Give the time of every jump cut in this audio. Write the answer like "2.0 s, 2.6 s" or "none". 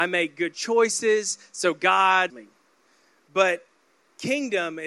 2.3 s